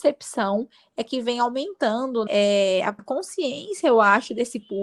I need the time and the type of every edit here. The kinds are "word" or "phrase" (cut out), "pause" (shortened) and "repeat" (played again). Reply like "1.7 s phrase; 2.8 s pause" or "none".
2.3 s word; 3.0 s word